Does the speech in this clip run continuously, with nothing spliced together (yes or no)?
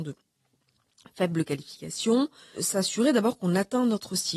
no